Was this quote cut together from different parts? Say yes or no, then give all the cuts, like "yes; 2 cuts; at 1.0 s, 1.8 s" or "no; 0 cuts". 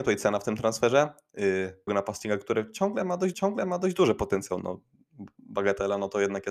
yes; 2 cuts; at 1.9 s, 3.3 s